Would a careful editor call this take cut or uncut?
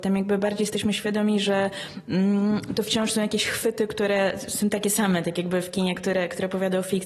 uncut